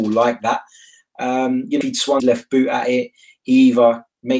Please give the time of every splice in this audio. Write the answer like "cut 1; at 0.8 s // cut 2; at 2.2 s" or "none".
cut 1; at 1.8 s // cut 2; at 2.2 s

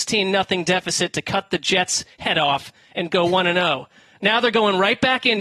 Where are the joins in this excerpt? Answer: none

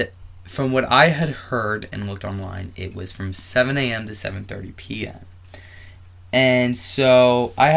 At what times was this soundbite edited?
none

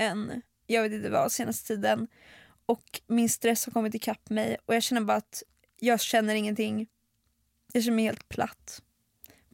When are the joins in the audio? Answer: none

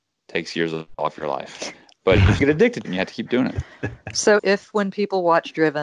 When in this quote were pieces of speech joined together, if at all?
cut 1; at 2.4 s // cut 2; at 2.8 s // cut 3; at 4.4 s

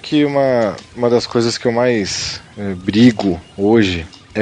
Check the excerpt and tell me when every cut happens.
none

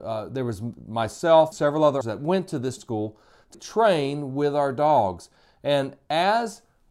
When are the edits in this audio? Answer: cut 1; at 1.5 s // cut 2; at 2.0 s // cut 3; at 2.8 s // cut 4; at 3.5 s

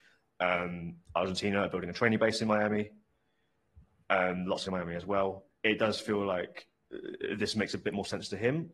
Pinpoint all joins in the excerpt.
cut 1; at 4.7 s

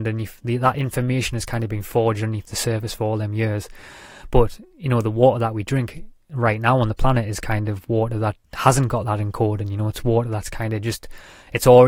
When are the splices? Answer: cut 1; at 8.4 s

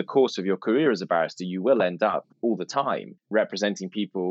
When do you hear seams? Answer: cut 1; at 2.3 s // cut 2; at 3.2 s

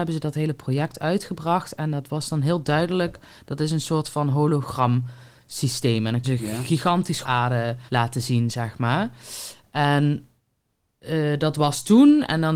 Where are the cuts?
cut 1; at 6.2 s // cut 2; at 7.2 s // cut 3; at 7.9 s

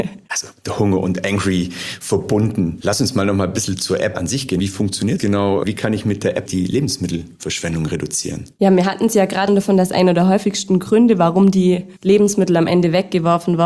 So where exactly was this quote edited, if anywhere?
cut 1; at 5.2 s // cut 2; at 6.5 s // cut 3; at 9.5 s // cut 4; at 12.0 s

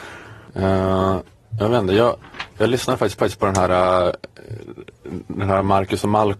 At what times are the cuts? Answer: cut 1; at 3.2 s

